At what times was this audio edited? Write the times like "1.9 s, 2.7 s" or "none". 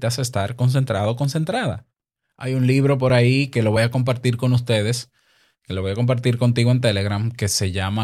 none